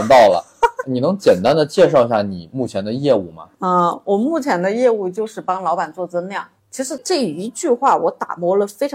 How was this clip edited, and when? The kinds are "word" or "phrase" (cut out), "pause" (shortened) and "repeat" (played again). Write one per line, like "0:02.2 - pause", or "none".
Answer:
0:03.5 - pause
0:06.6 - pause